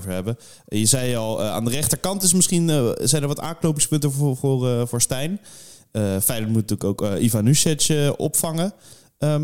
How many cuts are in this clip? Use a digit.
0